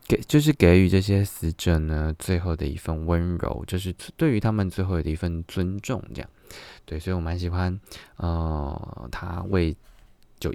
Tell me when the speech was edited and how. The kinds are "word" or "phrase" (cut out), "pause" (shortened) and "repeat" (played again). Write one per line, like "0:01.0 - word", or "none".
none